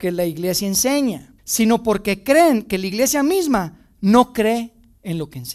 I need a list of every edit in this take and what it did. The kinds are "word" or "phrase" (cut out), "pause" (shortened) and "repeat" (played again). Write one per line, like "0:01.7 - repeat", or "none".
0:01.4 - pause

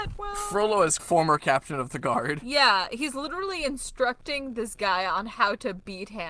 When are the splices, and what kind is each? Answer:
0:01.0 - phrase

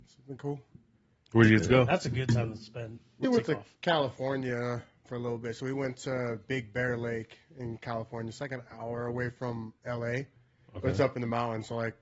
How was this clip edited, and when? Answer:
0:03.2 - word
0:05.1 - word

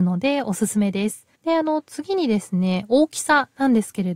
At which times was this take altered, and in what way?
0:01.4 - pause

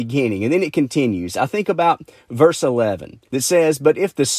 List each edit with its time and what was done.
0:03.3 - pause

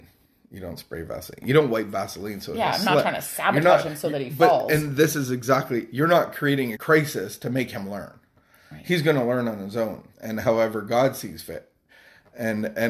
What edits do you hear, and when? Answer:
0:06.8 - word
0:10.1 - pause

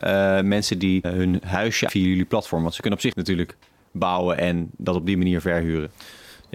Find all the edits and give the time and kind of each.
0:01.0 - word
0:01.9 - word
0:03.1 - phrase

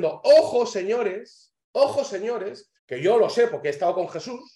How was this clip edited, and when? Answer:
0:01.6 - pause
0:02.8 - pause

